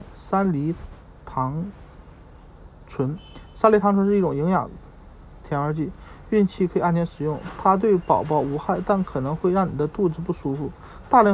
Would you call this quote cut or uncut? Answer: uncut